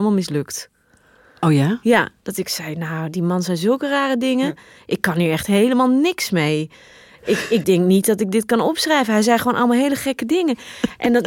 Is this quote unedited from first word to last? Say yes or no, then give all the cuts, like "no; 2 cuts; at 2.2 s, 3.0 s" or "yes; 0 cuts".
yes; 0 cuts